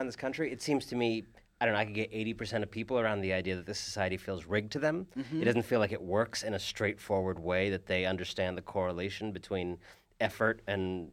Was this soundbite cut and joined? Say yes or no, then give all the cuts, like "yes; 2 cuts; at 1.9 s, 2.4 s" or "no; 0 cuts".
no; 0 cuts